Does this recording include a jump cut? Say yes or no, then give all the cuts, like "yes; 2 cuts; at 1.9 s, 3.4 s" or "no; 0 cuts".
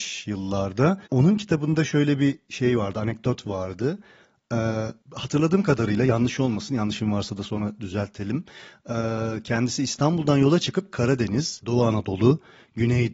yes; 2 cuts; at 1.1 s, 5.0 s